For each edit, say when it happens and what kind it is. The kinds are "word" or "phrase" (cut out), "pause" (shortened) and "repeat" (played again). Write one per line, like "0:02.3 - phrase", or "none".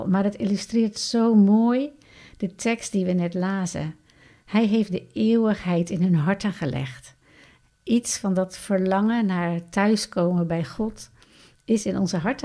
none